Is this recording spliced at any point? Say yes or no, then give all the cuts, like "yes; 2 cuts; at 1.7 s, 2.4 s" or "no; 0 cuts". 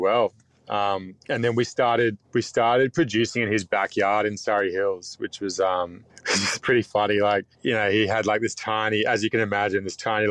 yes; 4 cuts; at 1.2 s, 2.2 s, 6.1 s, 7.5 s